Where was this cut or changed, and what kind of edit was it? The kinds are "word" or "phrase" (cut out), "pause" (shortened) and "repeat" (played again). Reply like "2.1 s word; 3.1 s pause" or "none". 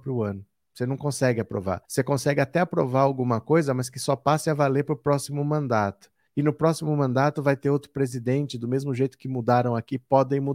1.9 s pause; 6.3 s pause